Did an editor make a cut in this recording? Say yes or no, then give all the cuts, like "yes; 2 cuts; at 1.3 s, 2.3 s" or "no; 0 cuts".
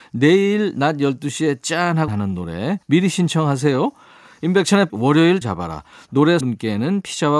yes; 5 cuts; at 2.1 s, 2.8 s, 4.9 s, 5.4 s, 6.4 s